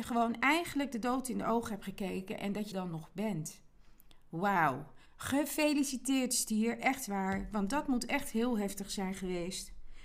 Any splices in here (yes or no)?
yes